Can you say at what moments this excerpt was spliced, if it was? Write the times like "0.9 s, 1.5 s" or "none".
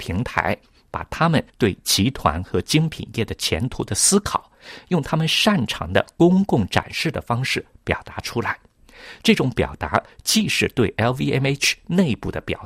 1.5 s